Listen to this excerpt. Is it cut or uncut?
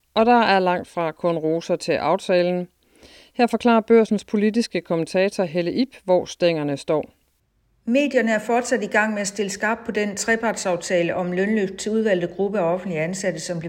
uncut